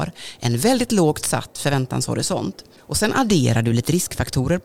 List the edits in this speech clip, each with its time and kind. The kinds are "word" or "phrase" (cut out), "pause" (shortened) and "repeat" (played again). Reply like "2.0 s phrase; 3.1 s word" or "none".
none